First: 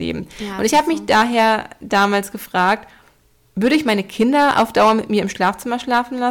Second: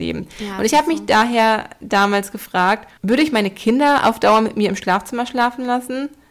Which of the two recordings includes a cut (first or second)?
second